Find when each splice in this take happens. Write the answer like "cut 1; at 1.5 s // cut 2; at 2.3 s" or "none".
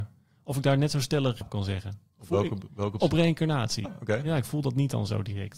cut 1; at 1.4 s // cut 2; at 2.1 s // cut 3; at 3.0 s // cut 4; at 3.8 s